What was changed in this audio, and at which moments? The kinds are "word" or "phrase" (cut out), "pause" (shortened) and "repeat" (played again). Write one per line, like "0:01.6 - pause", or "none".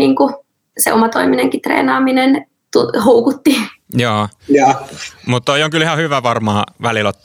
none